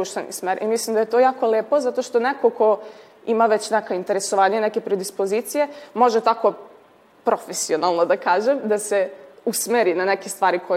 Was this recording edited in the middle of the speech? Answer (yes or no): no